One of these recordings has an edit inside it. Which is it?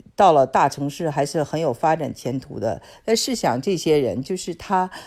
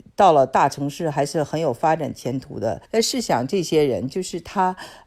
second; 1 cut; at 2.8 s

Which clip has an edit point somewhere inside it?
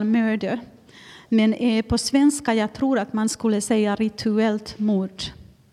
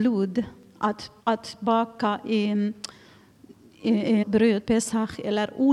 second; 3 cuts; at 1.2 s, 4.2 s, 4.6 s

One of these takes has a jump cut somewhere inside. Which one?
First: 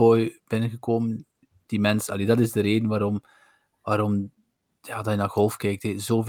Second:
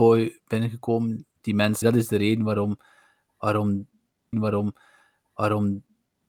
second; 3 cuts; at 1.4 s, 1.8 s, 4.3 s

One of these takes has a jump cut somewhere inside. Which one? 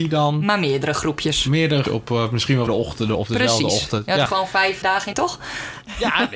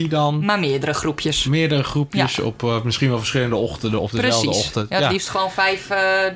first; 5 cuts; at 1.8 s, 2.7 s, 4.3 s, 4.8 s, 5.1 s

